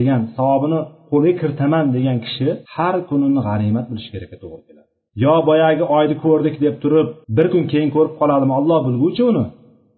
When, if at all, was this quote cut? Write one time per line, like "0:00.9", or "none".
0:02.6
0:05.1
0:07.2